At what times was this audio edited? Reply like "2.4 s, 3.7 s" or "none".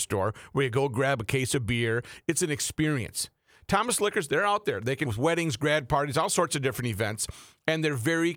5.1 s